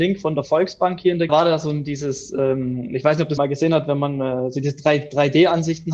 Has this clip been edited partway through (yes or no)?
yes